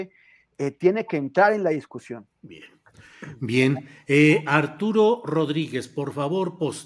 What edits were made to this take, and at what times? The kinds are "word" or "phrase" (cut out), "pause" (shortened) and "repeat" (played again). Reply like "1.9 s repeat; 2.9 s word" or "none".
2.3 s pause